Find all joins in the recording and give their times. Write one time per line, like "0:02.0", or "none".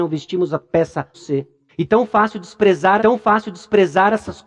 0:01.1
0:01.7
0:03.0